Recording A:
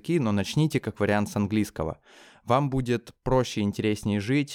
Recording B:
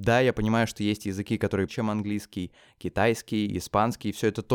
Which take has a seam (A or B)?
B